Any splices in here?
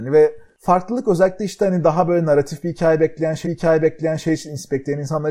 yes; 1 cut; at 3.4 s

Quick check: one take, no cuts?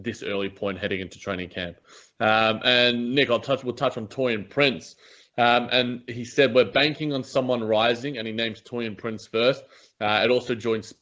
yes; 0 cuts

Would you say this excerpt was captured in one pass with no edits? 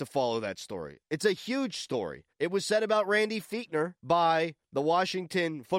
no; 3 cuts; at 1.0 s, 2.3 s, 4.0 s

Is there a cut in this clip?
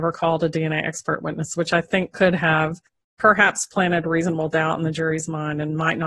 no; 0 cuts

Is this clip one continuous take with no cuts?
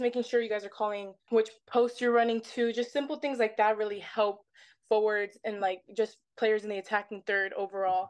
yes; 0 cuts

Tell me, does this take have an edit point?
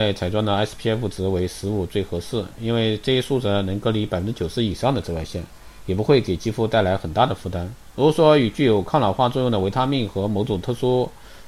no; 0 cuts

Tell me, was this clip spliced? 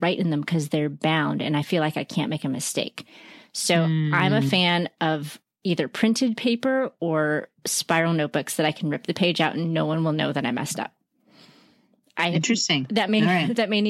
no; 0 cuts

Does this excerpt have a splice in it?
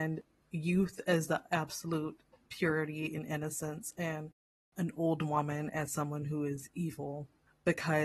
no; 0 cuts

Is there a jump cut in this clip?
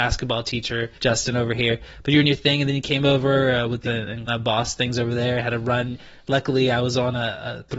yes; 4 cuts; at 1.0 s, 2.2 s, 3.8 s, 4.3 s

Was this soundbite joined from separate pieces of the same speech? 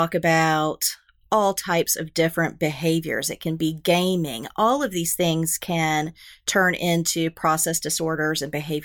no; 0 cuts

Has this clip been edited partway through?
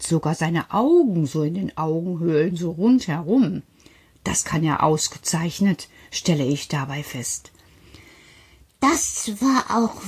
no; 0 cuts

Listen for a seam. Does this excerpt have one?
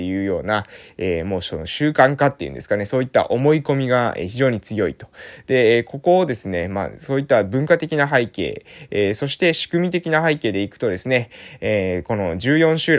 no; 0 cuts

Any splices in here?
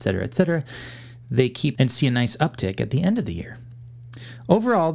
yes; 1 cut; at 1.8 s

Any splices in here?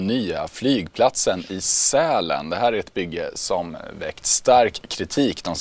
no; 0 cuts

